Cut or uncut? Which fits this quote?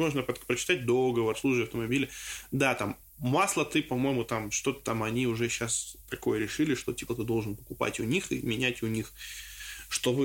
cut